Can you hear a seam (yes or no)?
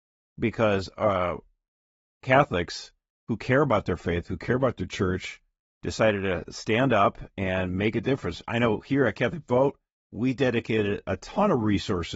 no